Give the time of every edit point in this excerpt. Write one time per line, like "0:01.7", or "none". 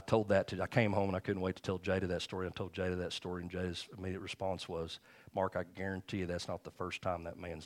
none